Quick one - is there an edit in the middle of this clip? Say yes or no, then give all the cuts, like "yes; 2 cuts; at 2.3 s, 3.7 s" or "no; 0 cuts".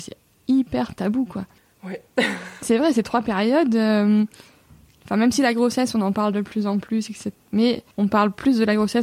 yes; 3 cuts; at 1.6 s, 2.6 s, 7.9 s